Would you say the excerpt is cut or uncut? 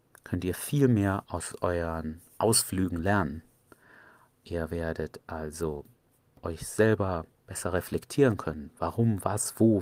uncut